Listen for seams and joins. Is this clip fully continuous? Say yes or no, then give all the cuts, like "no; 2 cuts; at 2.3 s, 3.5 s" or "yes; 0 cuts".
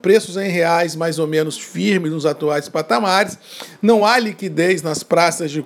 yes; 0 cuts